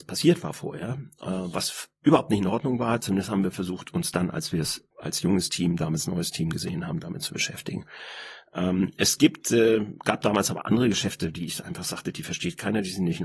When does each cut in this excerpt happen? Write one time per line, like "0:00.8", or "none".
0:04.9